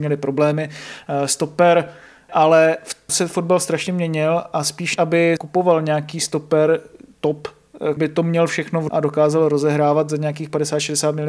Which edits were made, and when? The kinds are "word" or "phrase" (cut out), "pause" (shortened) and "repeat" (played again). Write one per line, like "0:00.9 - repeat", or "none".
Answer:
0:02.3 - word
0:03.1 - word
0:05.0 - word
0:05.4 - word
0:08.0 - word
0:08.9 - word